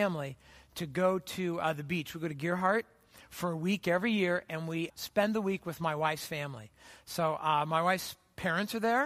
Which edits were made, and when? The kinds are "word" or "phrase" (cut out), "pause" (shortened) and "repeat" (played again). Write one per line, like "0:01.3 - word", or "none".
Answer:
0:04.9 - word